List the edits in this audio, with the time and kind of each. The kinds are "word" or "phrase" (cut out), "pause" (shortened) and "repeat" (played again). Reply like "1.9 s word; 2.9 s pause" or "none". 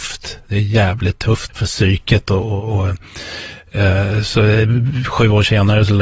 1.5 s word